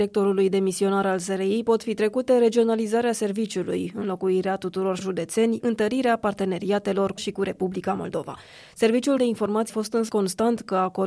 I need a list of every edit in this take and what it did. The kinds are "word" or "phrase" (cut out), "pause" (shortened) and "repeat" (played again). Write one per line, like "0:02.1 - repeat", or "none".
0:05.0 - word
0:05.6 - word
0:07.2 - word
0:09.2 - word
0:09.7 - word
0:10.1 - word